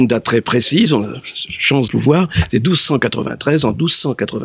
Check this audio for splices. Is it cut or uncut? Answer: cut